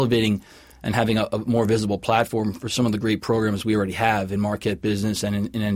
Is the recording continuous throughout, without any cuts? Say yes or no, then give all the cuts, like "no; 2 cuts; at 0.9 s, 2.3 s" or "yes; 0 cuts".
yes; 0 cuts